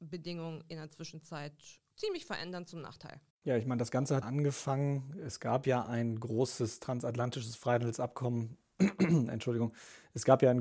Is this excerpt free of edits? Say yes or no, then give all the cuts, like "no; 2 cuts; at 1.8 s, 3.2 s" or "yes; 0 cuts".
no; 3 cuts; at 1.9 s, 3.3 s, 4.2 s